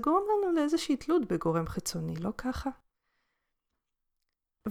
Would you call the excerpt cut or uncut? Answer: uncut